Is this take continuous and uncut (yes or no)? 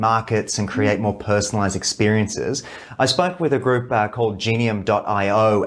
yes